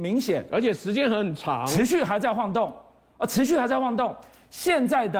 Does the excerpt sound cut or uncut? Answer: uncut